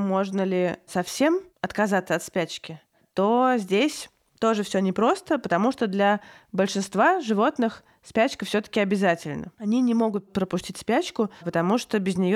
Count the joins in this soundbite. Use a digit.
0